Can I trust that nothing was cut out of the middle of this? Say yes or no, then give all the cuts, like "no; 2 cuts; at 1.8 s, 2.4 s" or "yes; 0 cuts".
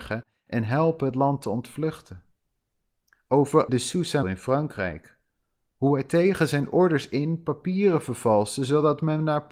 no; 2 cuts; at 3.7 s, 4.2 s